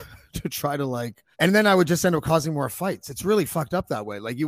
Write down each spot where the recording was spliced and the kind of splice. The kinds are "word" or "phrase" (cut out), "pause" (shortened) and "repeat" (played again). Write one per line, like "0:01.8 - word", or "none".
0:01.3 - pause